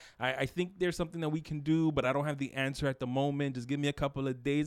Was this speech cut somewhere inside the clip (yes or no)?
no